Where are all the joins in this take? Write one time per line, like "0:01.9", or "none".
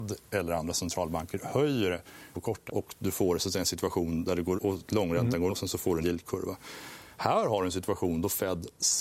0:02.3
0:02.7
0:04.6
0:05.5
0:06.0